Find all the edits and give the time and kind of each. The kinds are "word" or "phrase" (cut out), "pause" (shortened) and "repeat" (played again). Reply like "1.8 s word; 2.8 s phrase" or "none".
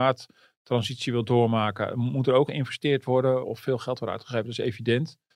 2.5 s word; 3.4 s word